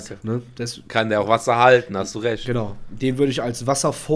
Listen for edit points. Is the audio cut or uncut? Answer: uncut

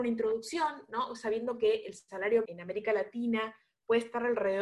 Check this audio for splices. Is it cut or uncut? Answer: cut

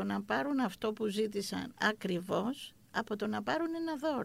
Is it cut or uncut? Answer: uncut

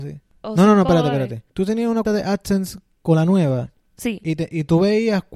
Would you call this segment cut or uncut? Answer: cut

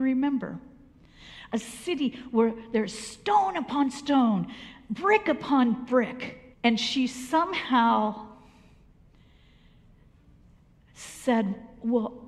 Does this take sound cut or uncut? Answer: cut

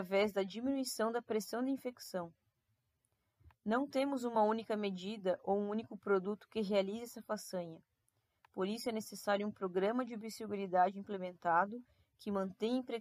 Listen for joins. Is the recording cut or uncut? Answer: uncut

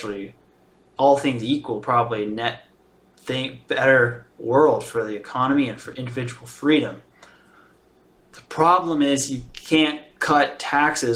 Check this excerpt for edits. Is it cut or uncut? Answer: uncut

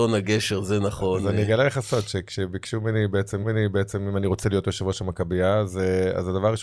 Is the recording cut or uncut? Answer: cut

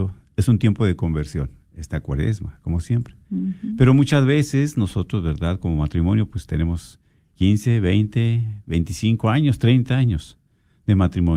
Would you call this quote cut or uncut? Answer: uncut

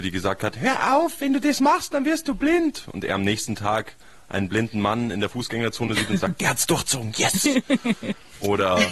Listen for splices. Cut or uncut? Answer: uncut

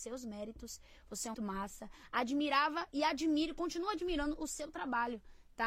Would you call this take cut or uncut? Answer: cut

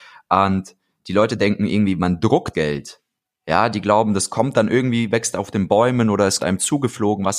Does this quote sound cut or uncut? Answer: cut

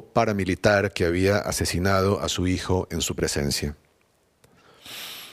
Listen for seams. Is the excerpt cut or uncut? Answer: uncut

